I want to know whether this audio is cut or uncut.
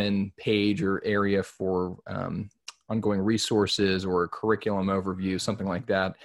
uncut